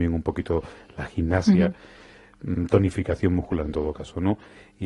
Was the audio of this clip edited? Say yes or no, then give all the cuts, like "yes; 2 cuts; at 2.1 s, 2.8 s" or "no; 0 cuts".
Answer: no; 0 cuts